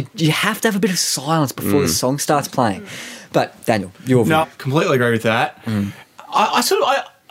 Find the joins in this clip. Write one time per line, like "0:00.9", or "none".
0:04.4